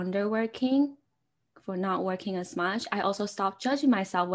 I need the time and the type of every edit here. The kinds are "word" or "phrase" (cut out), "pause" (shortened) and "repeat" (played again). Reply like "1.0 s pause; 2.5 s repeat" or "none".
none